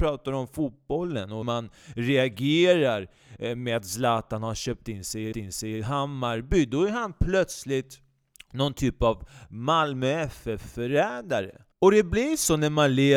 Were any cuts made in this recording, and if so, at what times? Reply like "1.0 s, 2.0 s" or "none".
1.4 s, 5.3 s, 8.3 s, 11.7 s